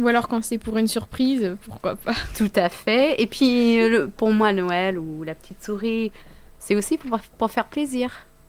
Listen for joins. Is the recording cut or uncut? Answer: uncut